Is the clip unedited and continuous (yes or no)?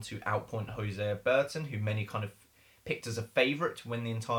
yes